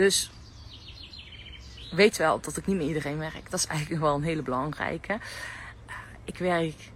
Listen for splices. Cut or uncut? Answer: uncut